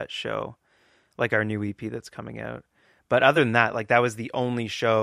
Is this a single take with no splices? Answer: yes; 0 cuts

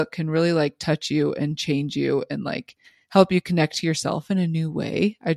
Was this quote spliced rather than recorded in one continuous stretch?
yes; 1 cut; at 2.8 s

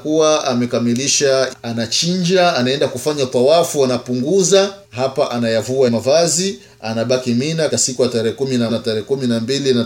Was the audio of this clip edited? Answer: yes; 5 cuts; at 1.5 s, 4.8 s, 5.9 s, 7.7 s, 8.7 s

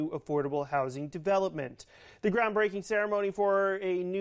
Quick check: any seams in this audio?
no; 0 cuts

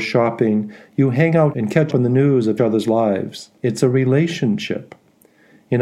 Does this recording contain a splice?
yes; 4 cuts; at 1.5 s, 1.9 s, 2.6 s, 3.6 s

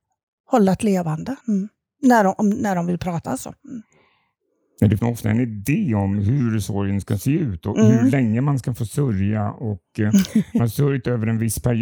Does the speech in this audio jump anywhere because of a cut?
yes; 3 cuts; at 1.4 s, 5.0 s, 10.6 s

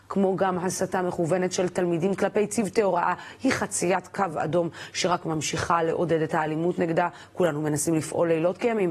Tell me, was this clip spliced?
no; 0 cuts

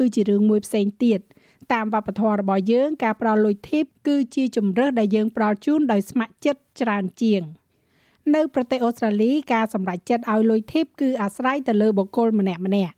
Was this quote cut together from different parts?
no; 0 cuts

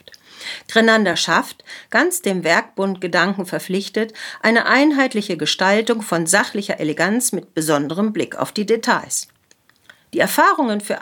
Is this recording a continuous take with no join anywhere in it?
yes; 0 cuts

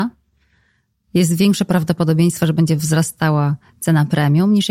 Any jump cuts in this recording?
no; 0 cuts

